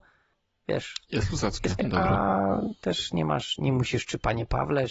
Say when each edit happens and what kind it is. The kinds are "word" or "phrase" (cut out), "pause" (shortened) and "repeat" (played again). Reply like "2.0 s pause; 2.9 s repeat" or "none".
1.8 s phrase